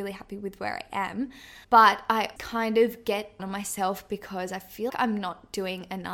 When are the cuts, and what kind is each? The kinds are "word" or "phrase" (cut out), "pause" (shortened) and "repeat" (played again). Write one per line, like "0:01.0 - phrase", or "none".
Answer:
0:01.6 - pause
0:02.4 - word
0:03.4 - word
0:04.9 - word